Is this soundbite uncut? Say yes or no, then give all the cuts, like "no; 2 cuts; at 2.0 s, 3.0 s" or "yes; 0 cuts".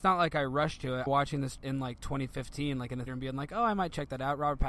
no; 3 cuts; at 1.1 s, 1.6 s, 3.1 s